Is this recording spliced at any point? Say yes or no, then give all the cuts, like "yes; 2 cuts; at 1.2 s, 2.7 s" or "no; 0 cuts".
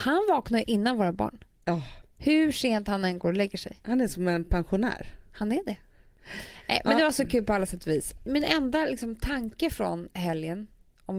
no; 0 cuts